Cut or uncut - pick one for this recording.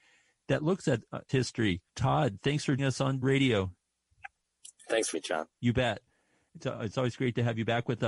cut